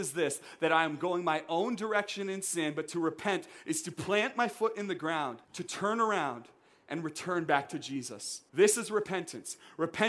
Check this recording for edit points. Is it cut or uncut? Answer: cut